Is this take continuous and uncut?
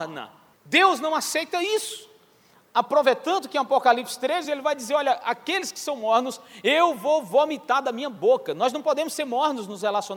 yes; 0 cuts

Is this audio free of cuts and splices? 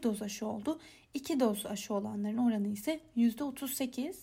yes; 0 cuts

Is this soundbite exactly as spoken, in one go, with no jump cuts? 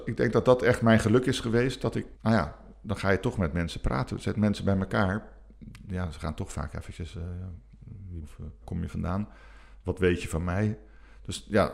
no; 3 cuts; at 2.1 s, 8.2 s, 8.6 s

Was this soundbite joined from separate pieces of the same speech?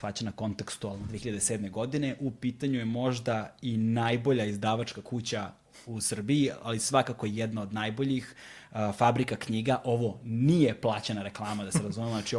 no; 0 cuts

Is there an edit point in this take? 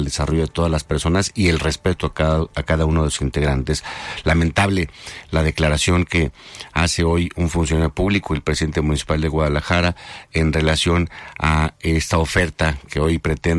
no; 0 cuts

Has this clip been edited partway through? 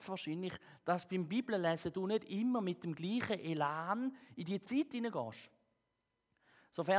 no; 0 cuts

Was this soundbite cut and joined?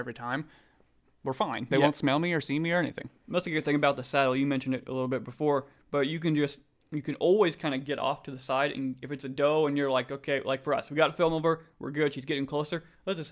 no; 0 cuts

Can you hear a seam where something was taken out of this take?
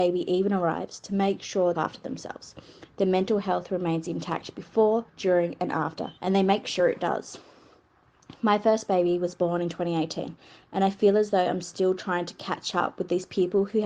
yes; 3 cuts; at 1.7 s, 5.1 s, 6.2 s

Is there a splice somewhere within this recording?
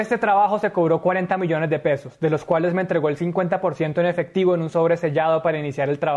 no; 0 cuts

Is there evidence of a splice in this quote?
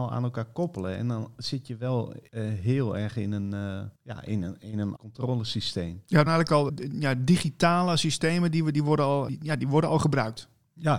yes; 6 cuts; at 2.3 s, 4.0 s, 5.0 s, 6.3 s, 6.7 s, 9.3 s

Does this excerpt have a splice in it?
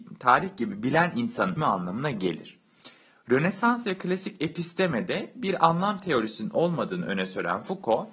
yes; 1 cut; at 1.6 s

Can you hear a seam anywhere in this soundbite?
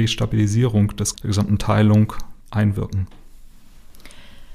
yes; 2 cuts; at 1.1 s, 2.4 s

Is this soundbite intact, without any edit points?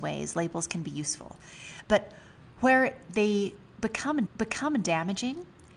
no; 2 cuts; at 2.5 s, 4.3 s

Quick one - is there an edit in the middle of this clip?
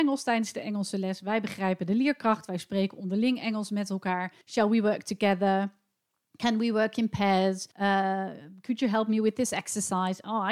yes; 2 cuts; at 4.4 s, 7.7 s

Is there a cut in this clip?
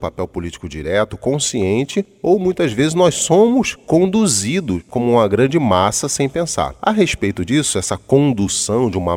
no; 0 cuts

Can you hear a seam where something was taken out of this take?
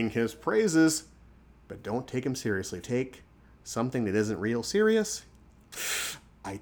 yes; 1 cut; at 2.8 s

